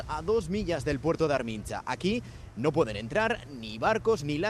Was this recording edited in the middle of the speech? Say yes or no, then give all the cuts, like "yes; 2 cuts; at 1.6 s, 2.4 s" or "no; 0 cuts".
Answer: no; 0 cuts